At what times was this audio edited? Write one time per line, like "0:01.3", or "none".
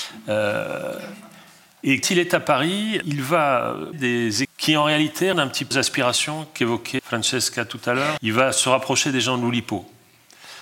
0:02.0
0:03.0
0:03.9
0:04.4
0:05.3
0:05.7
0:07.0
0:08.2